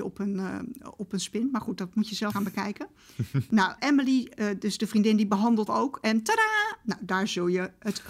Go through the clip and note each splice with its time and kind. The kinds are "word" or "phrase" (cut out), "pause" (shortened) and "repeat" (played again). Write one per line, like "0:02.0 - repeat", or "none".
0:02.3 - word
0:03.8 - word
0:05.7 - word